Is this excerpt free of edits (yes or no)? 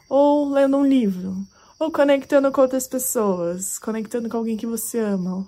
yes